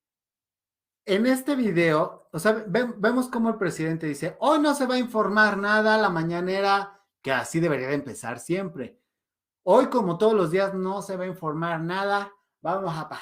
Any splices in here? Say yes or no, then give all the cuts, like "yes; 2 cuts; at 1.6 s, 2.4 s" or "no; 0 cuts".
no; 0 cuts